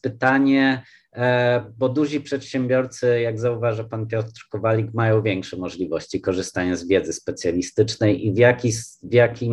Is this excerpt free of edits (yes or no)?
yes